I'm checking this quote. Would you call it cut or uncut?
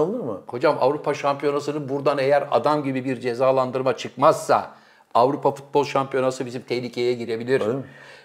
uncut